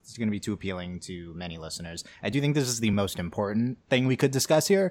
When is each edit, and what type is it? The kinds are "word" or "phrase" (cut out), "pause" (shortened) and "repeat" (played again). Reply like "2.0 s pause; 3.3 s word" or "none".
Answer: none

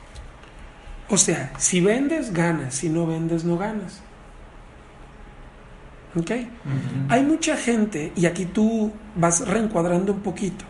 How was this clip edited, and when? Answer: none

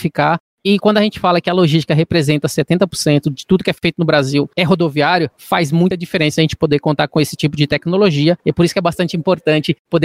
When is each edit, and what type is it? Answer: none

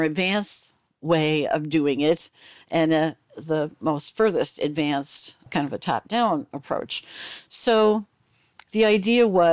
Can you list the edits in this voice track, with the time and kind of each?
5.5 s word

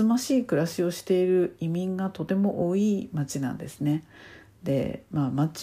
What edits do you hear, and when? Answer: none

